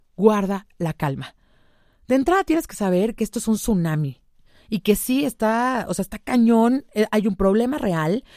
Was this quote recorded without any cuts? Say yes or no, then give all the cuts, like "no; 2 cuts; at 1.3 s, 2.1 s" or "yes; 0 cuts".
yes; 0 cuts